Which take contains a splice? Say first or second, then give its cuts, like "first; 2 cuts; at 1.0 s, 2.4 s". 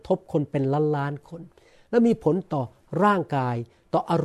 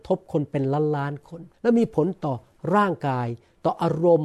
second; 1 cut; at 1.5 s